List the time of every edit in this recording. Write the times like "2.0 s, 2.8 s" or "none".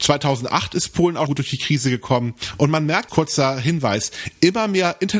1.3 s, 3.1 s